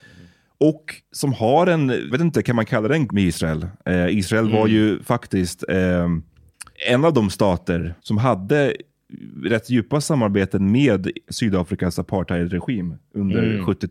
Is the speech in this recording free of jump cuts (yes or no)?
no